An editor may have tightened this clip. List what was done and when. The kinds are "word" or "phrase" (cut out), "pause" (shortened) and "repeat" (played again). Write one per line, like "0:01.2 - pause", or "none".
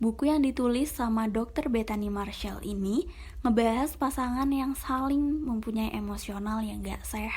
none